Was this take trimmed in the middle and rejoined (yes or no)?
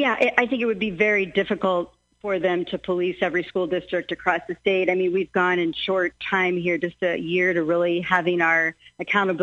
no